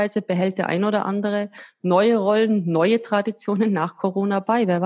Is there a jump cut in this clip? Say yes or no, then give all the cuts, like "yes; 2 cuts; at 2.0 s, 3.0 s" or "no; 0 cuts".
no; 0 cuts